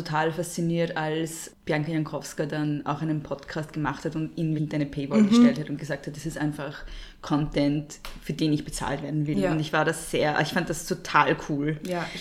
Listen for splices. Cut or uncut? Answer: cut